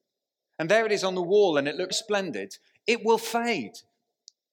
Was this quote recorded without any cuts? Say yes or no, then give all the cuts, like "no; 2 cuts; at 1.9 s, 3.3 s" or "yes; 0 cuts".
no; 1 cut; at 1.9 s